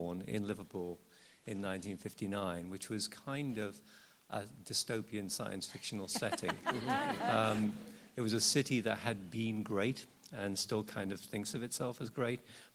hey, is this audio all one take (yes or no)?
yes